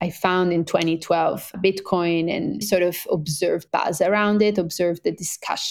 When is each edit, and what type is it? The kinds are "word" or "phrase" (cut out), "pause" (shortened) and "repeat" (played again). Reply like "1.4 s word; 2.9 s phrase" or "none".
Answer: 1.5 s word; 2.6 s word; 3.7 s word